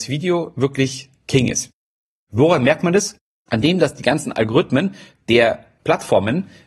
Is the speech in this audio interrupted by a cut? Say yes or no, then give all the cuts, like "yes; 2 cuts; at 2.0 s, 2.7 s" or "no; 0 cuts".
no; 0 cuts